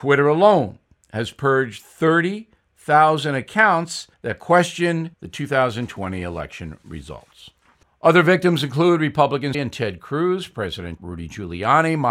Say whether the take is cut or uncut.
cut